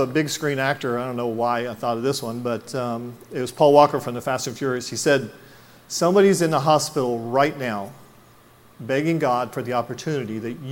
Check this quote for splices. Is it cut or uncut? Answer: uncut